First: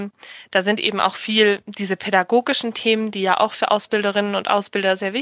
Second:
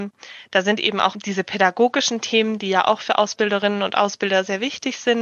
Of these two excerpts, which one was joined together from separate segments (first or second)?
second